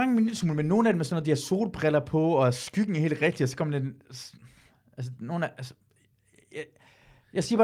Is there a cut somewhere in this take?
no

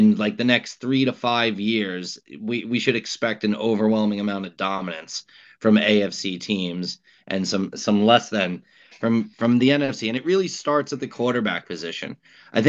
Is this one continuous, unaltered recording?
yes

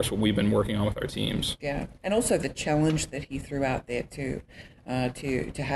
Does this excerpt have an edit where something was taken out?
no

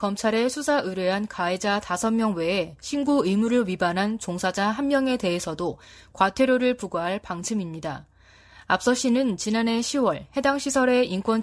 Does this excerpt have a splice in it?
no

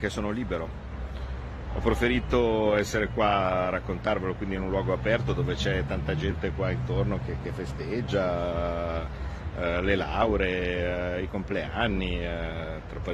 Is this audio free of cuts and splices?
yes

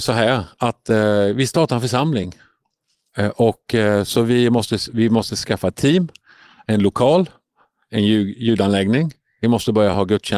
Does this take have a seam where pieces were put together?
no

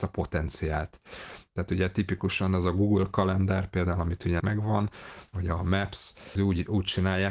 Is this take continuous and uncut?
no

